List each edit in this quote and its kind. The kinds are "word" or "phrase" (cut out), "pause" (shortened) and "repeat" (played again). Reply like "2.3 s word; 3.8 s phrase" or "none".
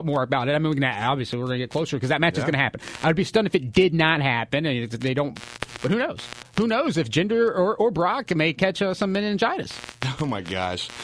none